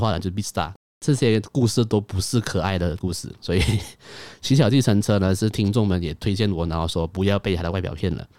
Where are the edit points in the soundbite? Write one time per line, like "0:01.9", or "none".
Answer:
0:03.4